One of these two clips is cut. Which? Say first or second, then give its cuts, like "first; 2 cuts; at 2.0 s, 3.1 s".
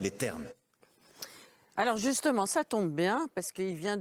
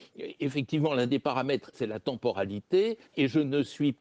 second; 2 cuts; at 1.7 s, 3.1 s